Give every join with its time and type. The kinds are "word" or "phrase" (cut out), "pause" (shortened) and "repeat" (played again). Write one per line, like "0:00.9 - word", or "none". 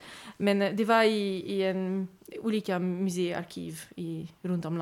none

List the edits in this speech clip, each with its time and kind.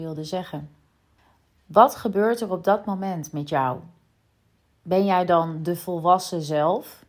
none

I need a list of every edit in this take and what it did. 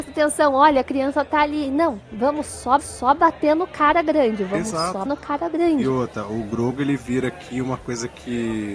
0:02.8 - repeat
0:05.1 - word

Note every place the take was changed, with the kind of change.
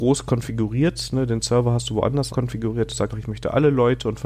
0:02.3 - phrase
0:03.1 - word

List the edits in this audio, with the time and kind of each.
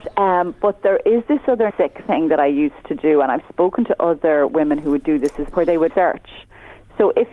0:01.7 - word
0:05.5 - word
0:05.9 - word

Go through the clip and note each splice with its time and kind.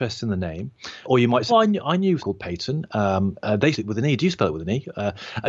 0:01.0 - word
0:01.5 - word
0:02.2 - word
0:03.7 - word

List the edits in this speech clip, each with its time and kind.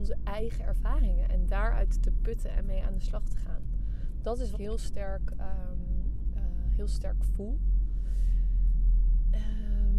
0:04.5 - phrase

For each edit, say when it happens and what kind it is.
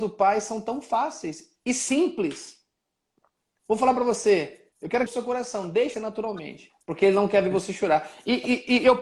0:04.7 - pause
0:05.1 - phrase
0:05.9 - word
0:06.8 - pause

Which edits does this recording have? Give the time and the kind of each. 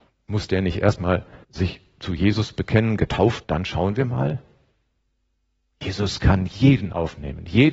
0:01.4 - pause
0:03.4 - phrase

